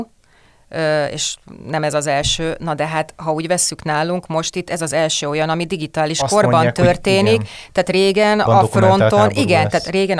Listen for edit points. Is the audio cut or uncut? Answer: cut